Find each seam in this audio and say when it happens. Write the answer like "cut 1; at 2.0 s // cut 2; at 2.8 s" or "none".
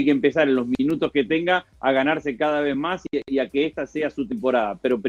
none